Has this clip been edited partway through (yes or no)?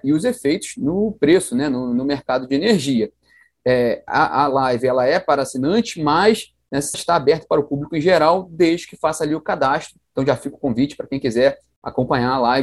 yes